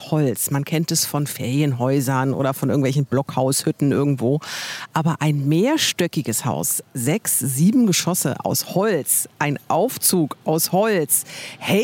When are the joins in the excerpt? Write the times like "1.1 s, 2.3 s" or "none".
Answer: none